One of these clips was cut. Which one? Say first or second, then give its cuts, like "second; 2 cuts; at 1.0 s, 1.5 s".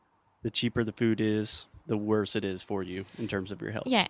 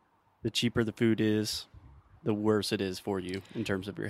first; 1 cut; at 1.8 s